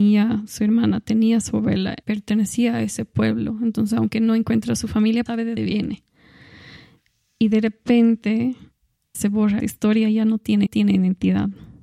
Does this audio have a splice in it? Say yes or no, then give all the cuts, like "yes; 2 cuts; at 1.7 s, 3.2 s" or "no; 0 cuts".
yes; 6 cuts; at 2.0 s, 5.3 s, 5.6 s, 9.1 s, 9.6 s, 10.7 s